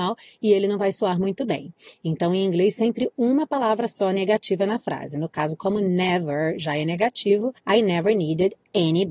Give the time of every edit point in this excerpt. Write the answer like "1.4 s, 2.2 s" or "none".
7.6 s